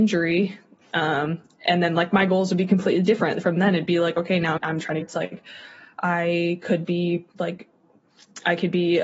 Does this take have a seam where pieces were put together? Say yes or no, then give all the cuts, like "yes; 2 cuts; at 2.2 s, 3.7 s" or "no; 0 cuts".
yes; 3 cuts; at 4.6 s, 5.0 s, 7.3 s